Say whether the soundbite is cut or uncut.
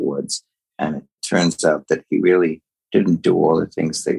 uncut